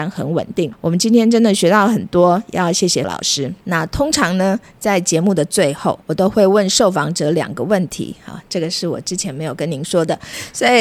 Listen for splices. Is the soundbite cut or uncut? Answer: cut